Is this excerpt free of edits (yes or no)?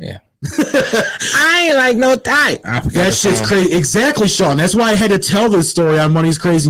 yes